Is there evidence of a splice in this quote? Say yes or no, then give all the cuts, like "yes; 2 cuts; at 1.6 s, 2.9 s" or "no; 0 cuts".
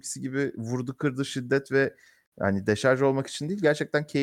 no; 0 cuts